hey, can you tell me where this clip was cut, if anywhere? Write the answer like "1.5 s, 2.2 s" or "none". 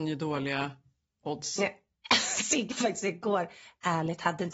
2.7 s